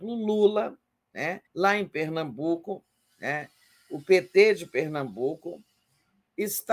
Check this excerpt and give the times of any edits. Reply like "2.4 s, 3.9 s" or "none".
1.5 s